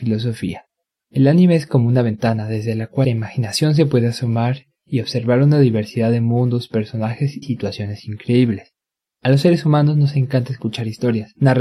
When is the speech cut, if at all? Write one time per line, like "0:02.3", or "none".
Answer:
0:03.0
0:07.4